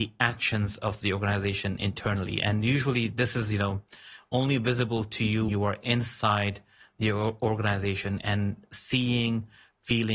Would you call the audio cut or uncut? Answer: cut